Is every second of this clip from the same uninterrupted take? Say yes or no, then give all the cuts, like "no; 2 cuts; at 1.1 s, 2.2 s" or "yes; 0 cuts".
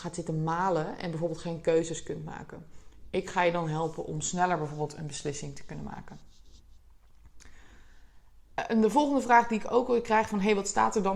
yes; 0 cuts